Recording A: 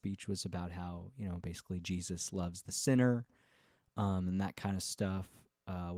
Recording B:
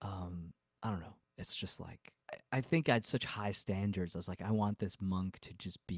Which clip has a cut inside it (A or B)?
B